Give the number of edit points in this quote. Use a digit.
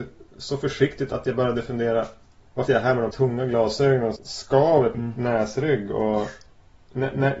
5